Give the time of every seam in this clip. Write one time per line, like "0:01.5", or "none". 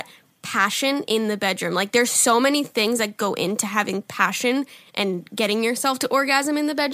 none